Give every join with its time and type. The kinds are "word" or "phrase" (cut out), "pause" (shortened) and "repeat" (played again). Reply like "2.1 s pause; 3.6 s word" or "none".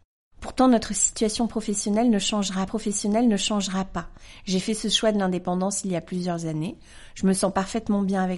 2.7 s repeat